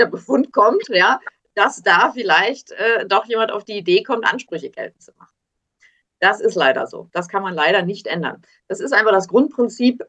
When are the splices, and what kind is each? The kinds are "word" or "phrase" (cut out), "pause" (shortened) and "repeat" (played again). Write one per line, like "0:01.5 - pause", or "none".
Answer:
none